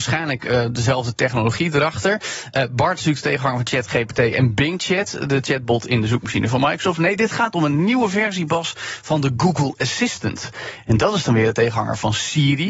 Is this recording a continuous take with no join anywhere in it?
yes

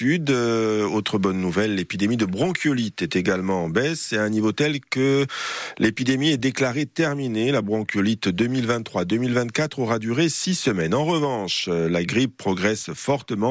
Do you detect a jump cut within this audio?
no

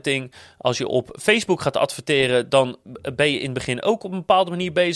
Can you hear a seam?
no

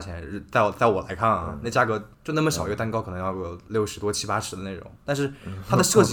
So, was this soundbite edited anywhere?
yes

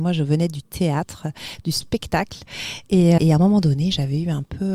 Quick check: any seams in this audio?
yes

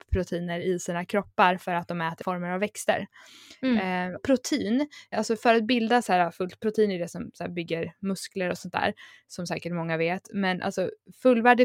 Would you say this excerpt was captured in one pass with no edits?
no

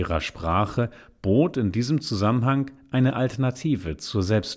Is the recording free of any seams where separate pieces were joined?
yes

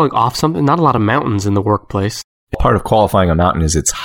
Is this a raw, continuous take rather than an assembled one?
yes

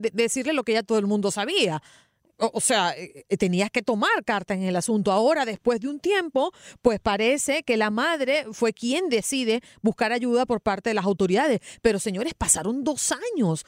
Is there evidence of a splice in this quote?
no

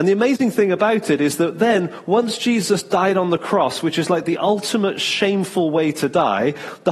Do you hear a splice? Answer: no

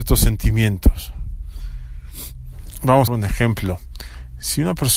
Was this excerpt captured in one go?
no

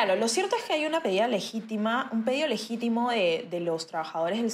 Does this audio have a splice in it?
no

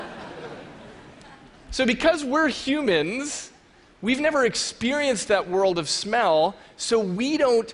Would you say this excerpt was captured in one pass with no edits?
yes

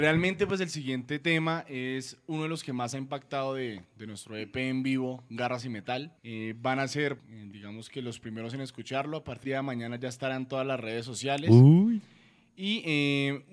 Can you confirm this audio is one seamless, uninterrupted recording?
no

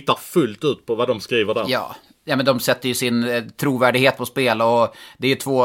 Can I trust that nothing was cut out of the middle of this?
yes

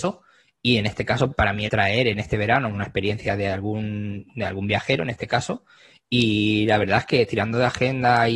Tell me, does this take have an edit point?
yes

